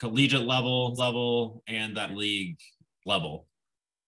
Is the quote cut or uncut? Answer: cut